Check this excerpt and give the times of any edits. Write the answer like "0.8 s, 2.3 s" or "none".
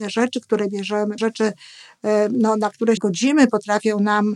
1.2 s, 3.0 s